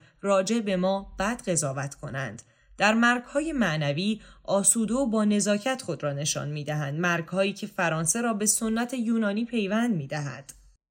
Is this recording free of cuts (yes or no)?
yes